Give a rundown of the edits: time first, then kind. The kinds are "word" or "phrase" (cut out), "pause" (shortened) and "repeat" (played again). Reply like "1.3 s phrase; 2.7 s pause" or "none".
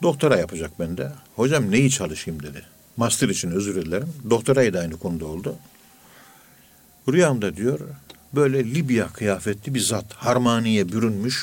1.3 s pause; 2.8 s pause